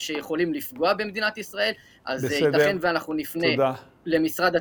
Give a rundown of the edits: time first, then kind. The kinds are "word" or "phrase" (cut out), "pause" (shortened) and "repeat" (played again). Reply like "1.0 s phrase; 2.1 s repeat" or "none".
none